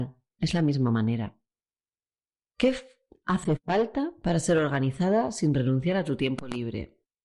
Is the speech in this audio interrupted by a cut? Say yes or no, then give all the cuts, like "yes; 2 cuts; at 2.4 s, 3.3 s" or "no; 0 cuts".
no; 0 cuts